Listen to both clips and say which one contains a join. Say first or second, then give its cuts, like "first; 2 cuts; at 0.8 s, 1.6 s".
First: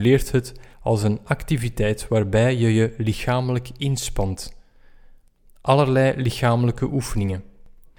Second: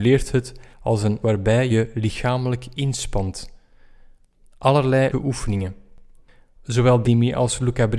second; 4 cuts; at 1.2 s, 1.7 s, 5.1 s, 7.0 s